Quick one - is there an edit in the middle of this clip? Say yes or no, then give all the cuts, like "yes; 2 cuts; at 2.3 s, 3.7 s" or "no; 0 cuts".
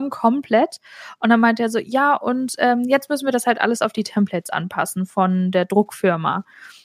no; 0 cuts